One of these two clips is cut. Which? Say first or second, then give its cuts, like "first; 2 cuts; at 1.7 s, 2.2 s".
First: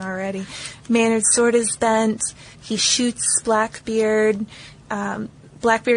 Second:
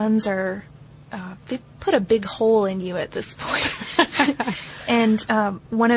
first; 1 cut; at 2.5 s